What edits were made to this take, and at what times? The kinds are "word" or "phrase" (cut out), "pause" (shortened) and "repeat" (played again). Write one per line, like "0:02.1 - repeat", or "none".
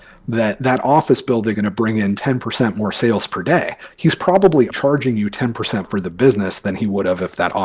0:01.5 - word
0:04.7 - word
0:05.8 - word

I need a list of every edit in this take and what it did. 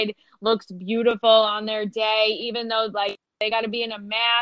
none

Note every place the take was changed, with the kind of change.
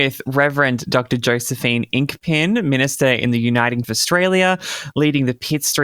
0:03.8 - word

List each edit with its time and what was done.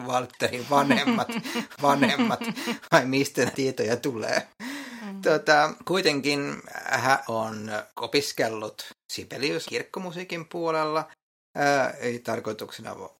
0:01.8 - repeat
0:03.5 - word
0:07.2 - word
0:07.9 - pause
0:09.6 - phrase

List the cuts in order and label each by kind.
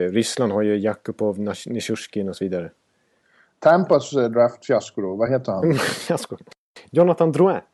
none

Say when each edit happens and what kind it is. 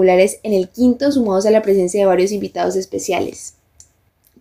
none

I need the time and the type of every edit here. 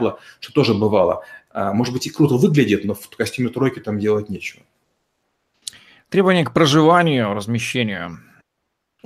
none

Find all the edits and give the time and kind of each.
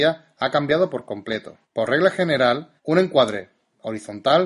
0:01.6 - pause
0:02.8 - pause

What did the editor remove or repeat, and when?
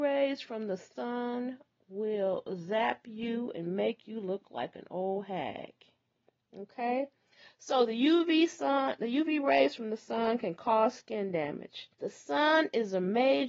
0:11.9 - pause

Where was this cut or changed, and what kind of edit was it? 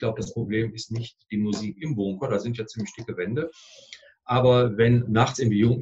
none

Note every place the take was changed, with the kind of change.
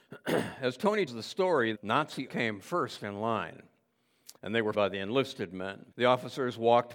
0:01.1 - word
0:01.7 - word
0:02.3 - word
0:04.4 - pause
0:04.7 - word
0:05.9 - pause

